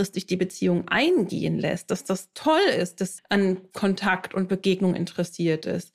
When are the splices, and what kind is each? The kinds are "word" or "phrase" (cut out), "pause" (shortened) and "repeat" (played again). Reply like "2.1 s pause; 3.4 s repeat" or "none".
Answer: 3.2 s word